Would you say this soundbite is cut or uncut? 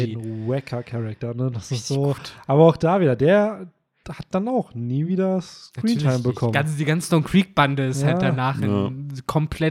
uncut